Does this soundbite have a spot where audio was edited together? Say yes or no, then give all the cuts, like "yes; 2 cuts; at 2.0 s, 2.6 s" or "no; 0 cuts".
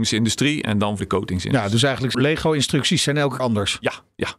yes; 3 cuts; at 1.0 s, 2.1 s, 3.4 s